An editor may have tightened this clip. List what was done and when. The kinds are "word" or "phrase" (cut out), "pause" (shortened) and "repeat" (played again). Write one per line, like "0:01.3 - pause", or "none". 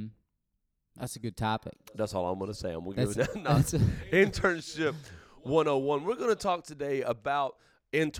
0:03.1 - word